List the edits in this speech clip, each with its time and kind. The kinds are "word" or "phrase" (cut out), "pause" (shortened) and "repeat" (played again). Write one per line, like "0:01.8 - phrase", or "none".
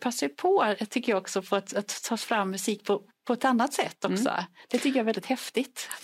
none